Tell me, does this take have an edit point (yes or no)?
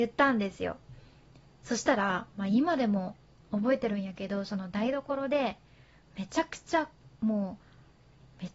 no